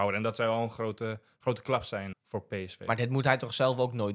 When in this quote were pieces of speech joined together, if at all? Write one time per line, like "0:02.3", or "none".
0:02.1